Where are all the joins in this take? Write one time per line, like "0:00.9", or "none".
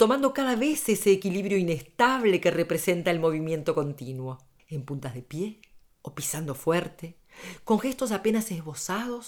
0:04.6